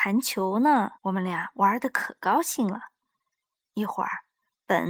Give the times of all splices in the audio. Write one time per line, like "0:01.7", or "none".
0:01.0